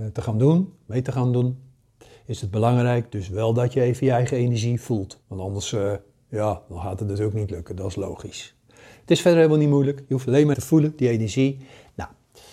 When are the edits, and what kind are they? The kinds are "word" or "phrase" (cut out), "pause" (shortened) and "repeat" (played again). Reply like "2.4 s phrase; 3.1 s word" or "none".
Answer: 5.2 s pause; 10.5 s word